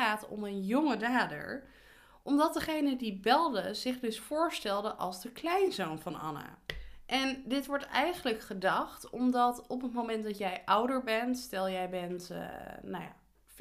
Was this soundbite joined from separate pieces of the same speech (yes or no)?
no